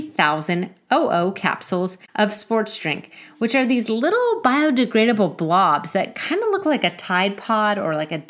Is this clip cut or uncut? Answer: uncut